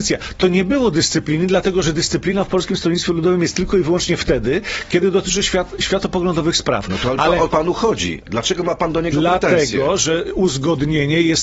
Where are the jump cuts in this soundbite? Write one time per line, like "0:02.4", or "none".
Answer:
0:07.5